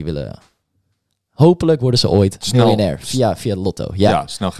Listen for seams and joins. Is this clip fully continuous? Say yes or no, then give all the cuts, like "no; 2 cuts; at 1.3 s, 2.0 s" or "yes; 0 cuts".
yes; 0 cuts